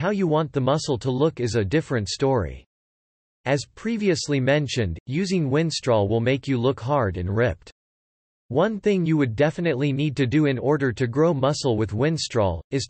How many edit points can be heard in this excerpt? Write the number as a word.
zero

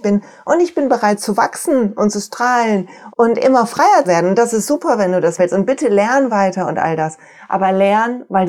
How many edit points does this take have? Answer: three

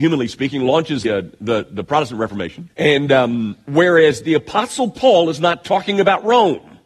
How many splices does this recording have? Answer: two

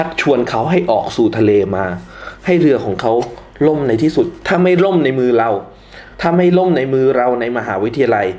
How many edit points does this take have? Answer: one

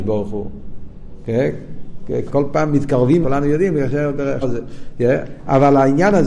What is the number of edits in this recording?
three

